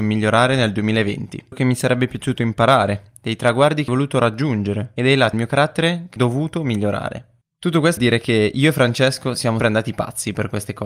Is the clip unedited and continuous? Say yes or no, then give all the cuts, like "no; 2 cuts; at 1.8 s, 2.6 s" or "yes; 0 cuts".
no; 6 cuts; at 1.5 s, 3.9 s, 5.3 s, 6.2 s, 8.0 s, 9.6 s